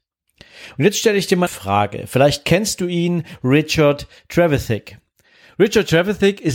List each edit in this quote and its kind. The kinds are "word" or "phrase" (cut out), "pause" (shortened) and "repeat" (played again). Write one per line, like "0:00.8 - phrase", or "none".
0:01.5 - word